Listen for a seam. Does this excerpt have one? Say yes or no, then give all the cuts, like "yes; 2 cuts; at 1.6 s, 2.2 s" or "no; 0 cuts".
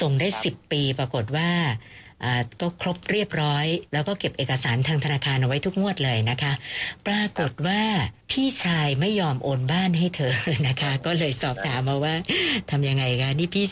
yes; 2 cuts; at 3.9 s, 8.2 s